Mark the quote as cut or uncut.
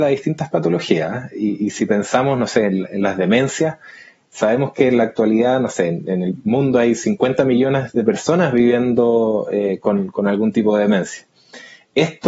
uncut